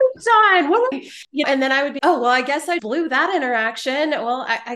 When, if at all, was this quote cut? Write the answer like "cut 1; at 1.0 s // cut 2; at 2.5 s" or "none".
cut 1; at 0.9 s // cut 2; at 1.4 s // cut 3; at 2.0 s // cut 4; at 2.8 s